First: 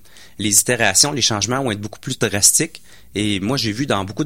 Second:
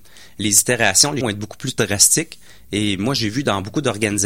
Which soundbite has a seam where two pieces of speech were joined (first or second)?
second